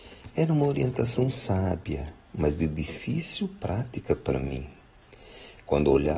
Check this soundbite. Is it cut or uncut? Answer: uncut